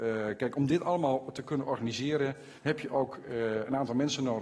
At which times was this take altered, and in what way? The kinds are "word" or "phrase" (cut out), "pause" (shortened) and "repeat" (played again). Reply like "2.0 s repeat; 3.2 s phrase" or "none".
2.6 s pause